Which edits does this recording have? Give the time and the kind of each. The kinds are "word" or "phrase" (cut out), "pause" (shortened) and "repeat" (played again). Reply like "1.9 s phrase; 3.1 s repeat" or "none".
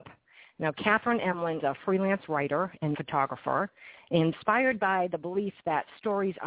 1.6 s word; 2.9 s word